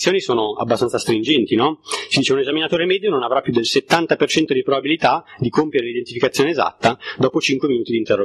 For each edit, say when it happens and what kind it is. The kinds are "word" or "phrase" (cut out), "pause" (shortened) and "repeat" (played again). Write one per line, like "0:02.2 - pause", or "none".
none